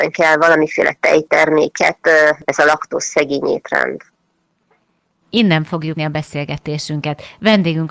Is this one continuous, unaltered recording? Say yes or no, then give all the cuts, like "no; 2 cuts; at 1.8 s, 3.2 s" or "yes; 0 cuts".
no; 2 cuts; at 2.4 s, 6.0 s